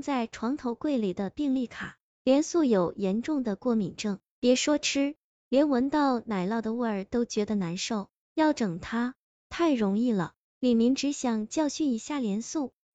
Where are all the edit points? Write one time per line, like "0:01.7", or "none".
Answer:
none